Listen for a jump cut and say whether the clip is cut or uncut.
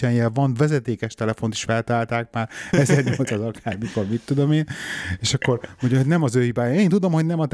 uncut